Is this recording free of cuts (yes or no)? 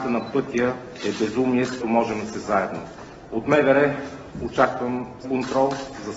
no